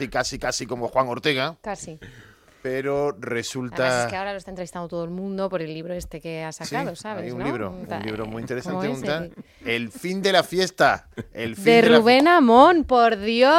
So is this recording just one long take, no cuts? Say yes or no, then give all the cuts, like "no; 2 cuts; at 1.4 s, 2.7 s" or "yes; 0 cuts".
yes; 0 cuts